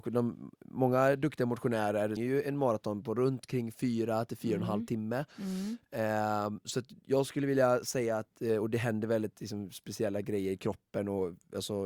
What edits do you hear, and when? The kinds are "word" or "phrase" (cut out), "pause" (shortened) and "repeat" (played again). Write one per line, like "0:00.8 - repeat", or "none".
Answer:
0:02.2 - word